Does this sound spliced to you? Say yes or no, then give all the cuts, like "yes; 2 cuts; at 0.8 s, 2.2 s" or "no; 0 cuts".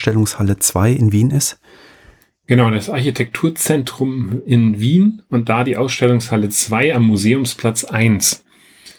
no; 0 cuts